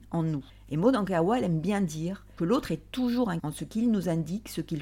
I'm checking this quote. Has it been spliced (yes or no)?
yes